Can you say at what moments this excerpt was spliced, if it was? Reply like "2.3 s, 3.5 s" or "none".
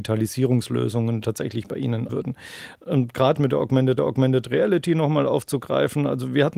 1.2 s, 2.1 s, 3.3 s, 4.0 s